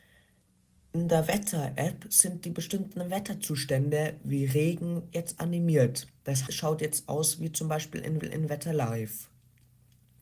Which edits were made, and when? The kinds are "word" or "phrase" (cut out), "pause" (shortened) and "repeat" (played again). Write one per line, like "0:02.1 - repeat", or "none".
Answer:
0:06.5 - word
0:08.2 - repeat